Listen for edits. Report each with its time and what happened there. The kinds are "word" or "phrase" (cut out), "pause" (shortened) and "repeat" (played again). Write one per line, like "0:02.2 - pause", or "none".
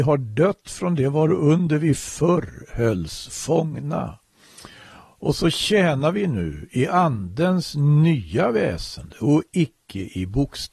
none